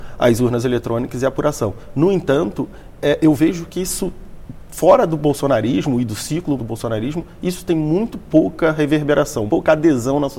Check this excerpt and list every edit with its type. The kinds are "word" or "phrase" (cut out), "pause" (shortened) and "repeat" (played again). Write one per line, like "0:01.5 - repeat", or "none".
0:06.6 - phrase
0:09.5 - word